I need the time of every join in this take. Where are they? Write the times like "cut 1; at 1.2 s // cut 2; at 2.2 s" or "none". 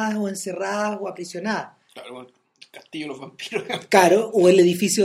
none